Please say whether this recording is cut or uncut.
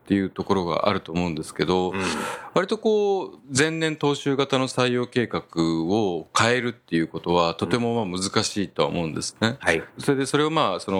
uncut